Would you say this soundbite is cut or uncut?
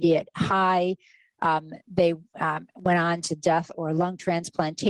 uncut